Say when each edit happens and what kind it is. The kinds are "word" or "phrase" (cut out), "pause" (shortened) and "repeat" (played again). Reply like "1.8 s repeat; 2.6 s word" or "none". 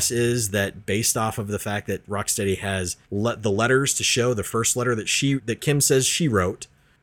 3.0 s pause; 5.4 s word

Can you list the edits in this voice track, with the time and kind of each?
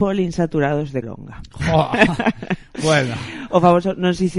1.0 s word

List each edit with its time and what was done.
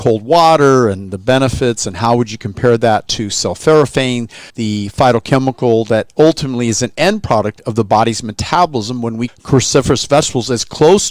4.5 s pause; 9.3 s word

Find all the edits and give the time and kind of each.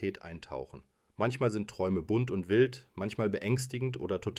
1.1 s pause

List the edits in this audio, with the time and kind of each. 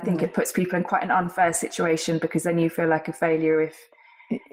none

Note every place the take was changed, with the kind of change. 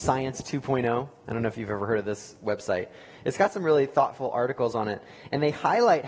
none

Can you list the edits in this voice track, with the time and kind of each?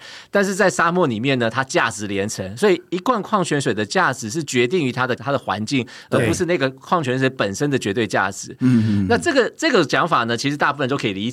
5.2 s word

